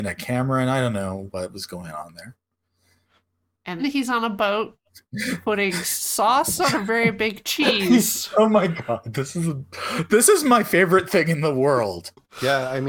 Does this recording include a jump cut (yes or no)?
yes